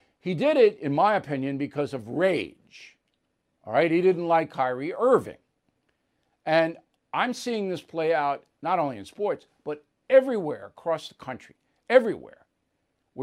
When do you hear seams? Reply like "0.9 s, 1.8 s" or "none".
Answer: none